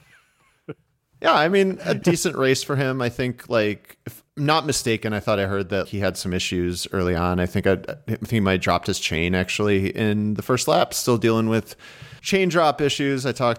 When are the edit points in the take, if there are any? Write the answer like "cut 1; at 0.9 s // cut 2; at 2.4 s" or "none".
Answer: cut 1; at 2.0 s // cut 2; at 4.3 s // cut 3; at 5.9 s // cut 4; at 12.2 s